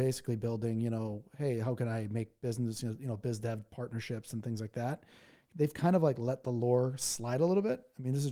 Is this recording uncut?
yes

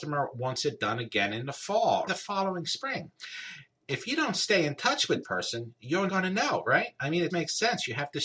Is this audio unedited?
no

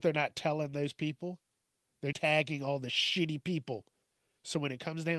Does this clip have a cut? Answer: yes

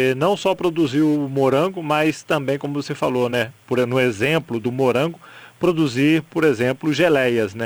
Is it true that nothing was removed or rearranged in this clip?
yes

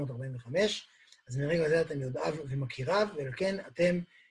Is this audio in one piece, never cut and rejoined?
yes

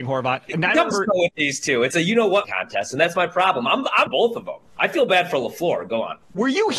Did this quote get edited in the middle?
yes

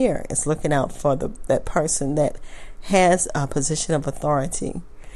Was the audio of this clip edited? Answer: no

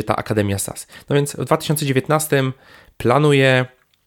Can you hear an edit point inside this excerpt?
no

